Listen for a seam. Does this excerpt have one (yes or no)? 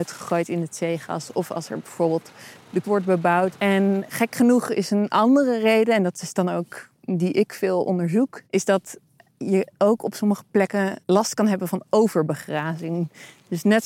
yes